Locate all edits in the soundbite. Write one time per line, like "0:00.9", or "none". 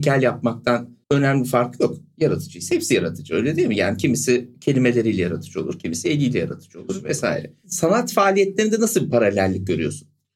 0:01.0